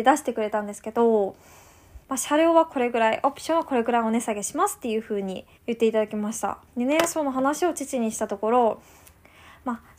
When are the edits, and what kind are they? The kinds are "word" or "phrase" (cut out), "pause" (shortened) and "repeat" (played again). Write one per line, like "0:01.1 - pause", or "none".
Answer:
0:02.0 - pause
0:05.5 - pause
0:06.7 - pause